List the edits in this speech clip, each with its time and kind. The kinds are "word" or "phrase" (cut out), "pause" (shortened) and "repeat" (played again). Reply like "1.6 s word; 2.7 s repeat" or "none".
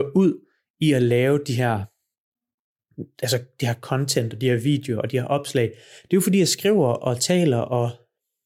none